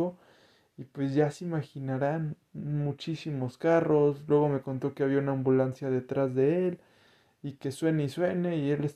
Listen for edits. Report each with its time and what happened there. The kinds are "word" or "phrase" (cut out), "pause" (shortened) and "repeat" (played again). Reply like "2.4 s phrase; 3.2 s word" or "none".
none